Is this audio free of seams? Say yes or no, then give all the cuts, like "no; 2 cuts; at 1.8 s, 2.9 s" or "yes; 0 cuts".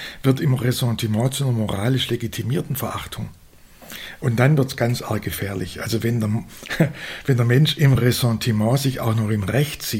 yes; 0 cuts